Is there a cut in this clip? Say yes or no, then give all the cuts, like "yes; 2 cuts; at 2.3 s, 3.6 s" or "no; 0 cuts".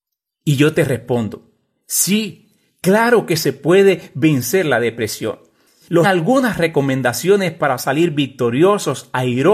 yes; 1 cut; at 6.0 s